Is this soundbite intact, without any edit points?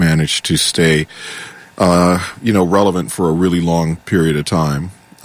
yes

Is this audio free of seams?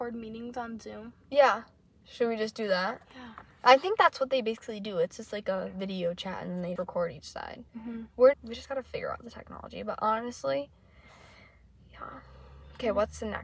no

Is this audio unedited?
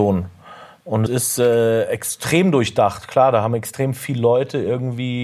no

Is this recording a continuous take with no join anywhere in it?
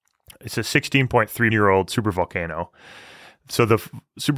no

